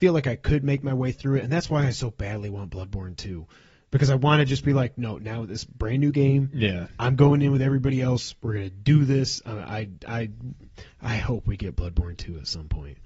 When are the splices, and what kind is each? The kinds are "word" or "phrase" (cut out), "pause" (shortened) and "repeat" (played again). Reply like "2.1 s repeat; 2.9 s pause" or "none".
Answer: none

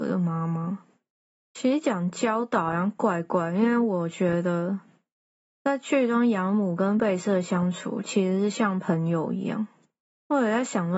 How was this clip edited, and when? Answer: none

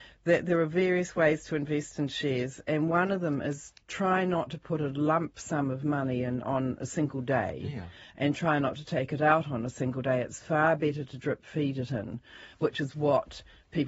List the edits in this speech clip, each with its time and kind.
3.8 s pause

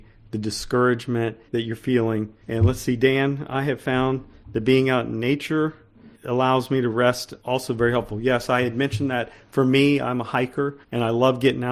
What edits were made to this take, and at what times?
1.5 s pause; 2.4 s pause; 6.1 s pause; 7.4 s pause; 10.8 s pause

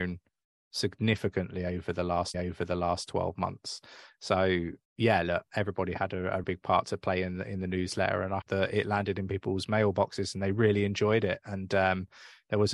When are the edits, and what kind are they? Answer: 2.3 s repeat; 4.8 s pause; 6.4 s word; 8.4 s word

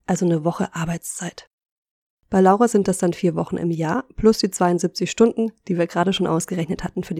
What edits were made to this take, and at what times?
none

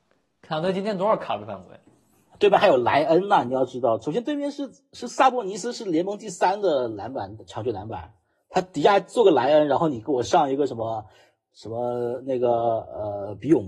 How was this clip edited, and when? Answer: none

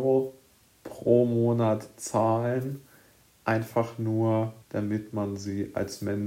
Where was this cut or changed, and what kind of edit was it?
4.6 s pause

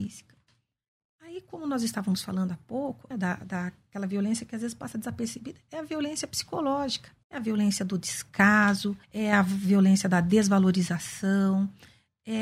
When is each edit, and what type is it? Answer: 3.1 s word; 7.2 s pause; 9.0 s pause

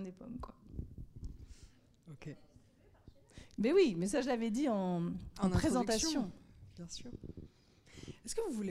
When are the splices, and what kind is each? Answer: none

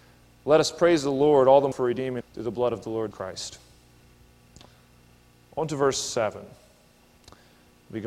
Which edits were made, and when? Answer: 1.7 s word; 2.2 s word; 3.1 s word

